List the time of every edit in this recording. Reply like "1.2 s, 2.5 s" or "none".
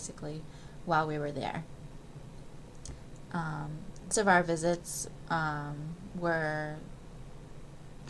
4.1 s